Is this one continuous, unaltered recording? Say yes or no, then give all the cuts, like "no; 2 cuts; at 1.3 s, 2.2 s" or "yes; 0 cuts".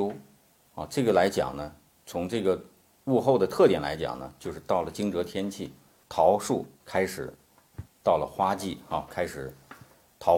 yes; 0 cuts